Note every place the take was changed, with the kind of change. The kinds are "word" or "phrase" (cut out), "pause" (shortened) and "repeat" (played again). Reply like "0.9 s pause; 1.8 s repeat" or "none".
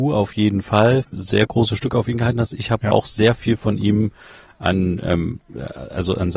1.0 s word